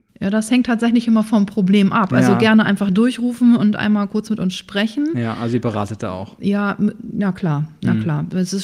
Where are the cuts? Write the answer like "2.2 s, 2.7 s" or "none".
none